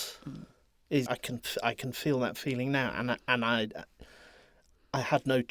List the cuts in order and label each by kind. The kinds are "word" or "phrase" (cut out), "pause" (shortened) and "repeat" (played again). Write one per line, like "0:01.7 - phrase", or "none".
0:01.1 - word